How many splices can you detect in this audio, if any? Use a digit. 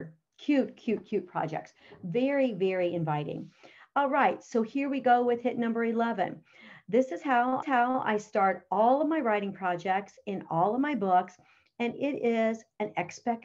1